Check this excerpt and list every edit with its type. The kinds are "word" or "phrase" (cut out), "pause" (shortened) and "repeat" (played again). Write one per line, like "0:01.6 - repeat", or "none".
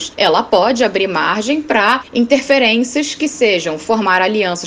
none